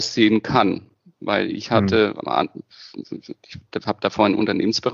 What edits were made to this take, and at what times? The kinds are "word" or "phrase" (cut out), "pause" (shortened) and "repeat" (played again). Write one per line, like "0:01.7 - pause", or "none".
0:02.2 - word